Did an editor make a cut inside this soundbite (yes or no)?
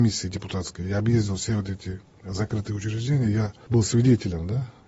no